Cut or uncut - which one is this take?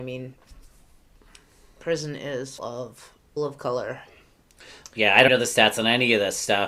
cut